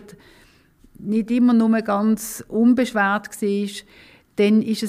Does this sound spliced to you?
no; 0 cuts

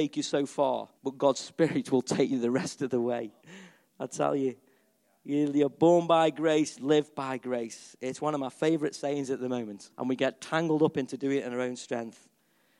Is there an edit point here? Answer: yes; 3 cuts; at 1.0 s, 3.4 s, 9.9 s

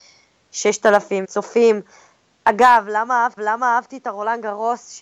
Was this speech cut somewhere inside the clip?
yes; 2 cuts; at 1.2 s, 3.4 s

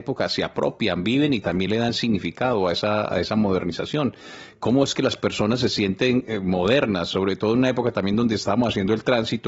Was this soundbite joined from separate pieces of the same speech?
no; 0 cuts

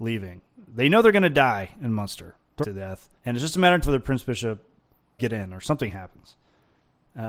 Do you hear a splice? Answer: yes; 4 cuts; at 2.6 s, 3.2 s, 3.8 s, 5.2 s

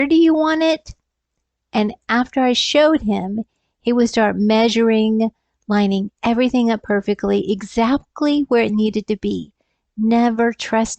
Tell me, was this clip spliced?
no; 0 cuts

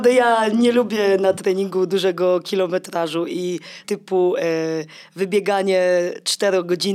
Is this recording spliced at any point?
yes; 1 cut; at 3.8 s

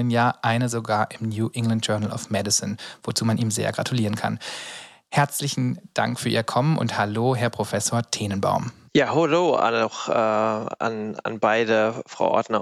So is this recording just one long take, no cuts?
yes; 0 cuts

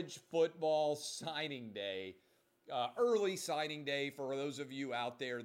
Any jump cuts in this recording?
no; 0 cuts

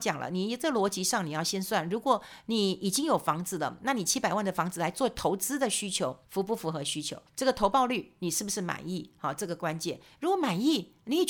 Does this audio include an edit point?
yes; 2 cuts; at 6.2 s, 7.3 s

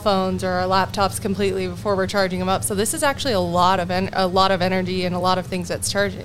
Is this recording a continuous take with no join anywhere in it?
yes; 0 cuts

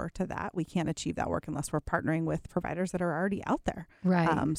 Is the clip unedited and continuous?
yes; 0 cuts

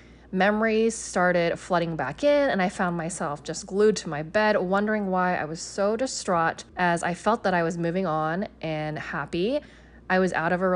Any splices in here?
yes; 1 cut; at 6.7 s

